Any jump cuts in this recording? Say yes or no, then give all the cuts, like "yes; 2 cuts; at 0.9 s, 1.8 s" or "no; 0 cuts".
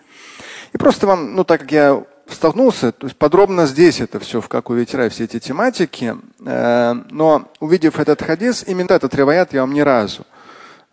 yes; 2 cuts; at 7.5 s, 8.9 s